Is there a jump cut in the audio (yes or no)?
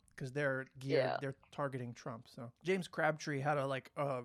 no